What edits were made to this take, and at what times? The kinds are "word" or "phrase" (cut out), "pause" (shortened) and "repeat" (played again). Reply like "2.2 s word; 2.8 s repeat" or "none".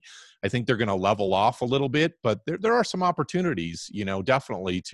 none